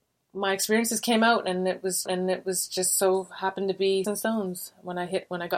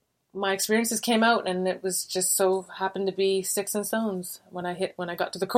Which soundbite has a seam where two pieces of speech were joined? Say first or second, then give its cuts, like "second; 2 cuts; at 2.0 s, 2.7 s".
first; 2 cuts; at 2.1 s, 4.0 s